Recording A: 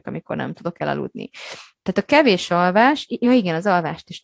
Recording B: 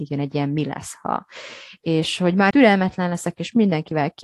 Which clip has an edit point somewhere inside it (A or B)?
B